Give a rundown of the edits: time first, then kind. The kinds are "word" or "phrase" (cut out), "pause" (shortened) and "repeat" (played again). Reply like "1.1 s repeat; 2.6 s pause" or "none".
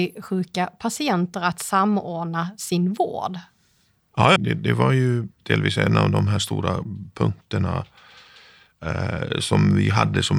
4.4 s phrase; 5.3 s pause